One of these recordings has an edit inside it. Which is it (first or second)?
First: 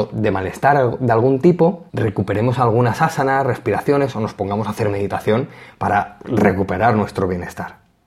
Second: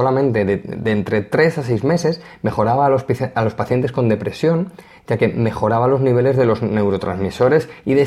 first